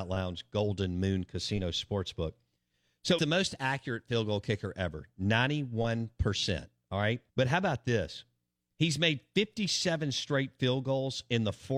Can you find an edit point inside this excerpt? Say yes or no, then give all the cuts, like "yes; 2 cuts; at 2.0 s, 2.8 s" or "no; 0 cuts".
yes; 2 cuts; at 3.2 s, 7.3 s